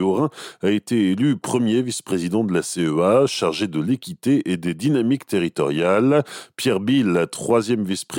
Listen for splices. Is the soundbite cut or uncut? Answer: uncut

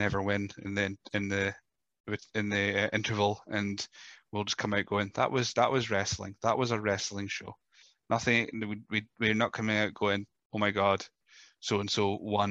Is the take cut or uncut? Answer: uncut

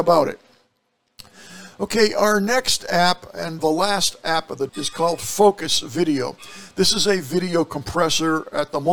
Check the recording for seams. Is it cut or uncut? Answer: cut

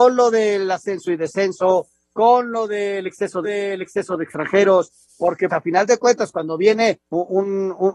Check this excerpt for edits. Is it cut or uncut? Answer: cut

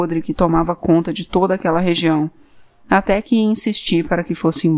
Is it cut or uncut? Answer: uncut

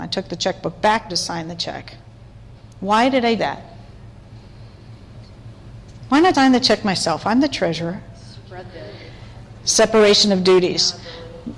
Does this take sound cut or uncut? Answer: cut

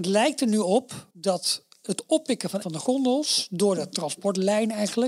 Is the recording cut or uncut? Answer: cut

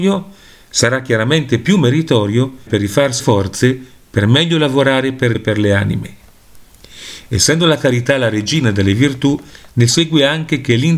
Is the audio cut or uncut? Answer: cut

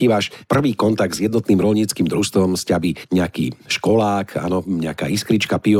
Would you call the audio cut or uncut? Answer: uncut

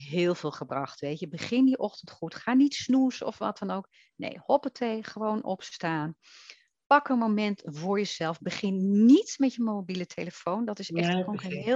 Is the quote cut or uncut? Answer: uncut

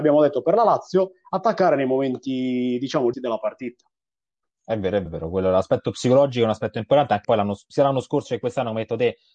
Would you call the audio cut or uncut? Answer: cut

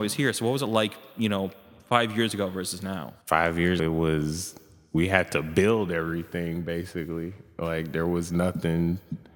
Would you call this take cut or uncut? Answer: cut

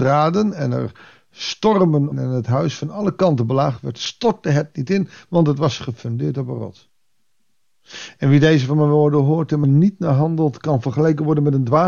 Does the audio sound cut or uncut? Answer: cut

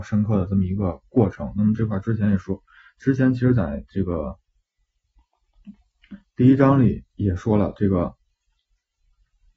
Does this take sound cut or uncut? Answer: cut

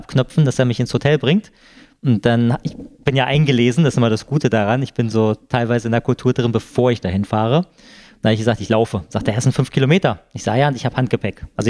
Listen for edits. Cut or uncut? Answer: uncut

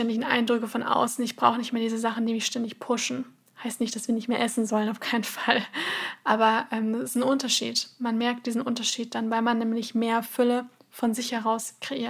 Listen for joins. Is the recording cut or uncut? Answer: uncut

